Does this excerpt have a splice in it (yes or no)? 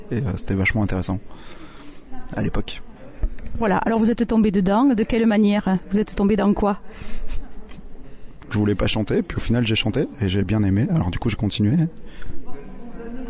no